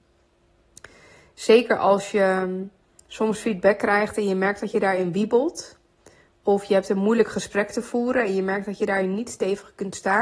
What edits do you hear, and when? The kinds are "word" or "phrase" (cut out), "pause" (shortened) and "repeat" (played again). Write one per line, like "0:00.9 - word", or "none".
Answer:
none

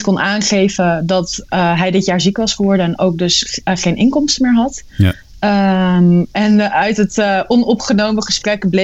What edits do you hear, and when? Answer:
none

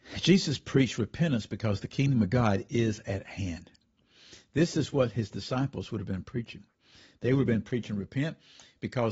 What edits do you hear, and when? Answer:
none

